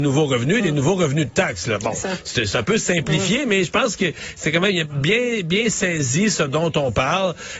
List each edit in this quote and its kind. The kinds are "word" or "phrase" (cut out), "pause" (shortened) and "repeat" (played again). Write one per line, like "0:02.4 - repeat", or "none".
none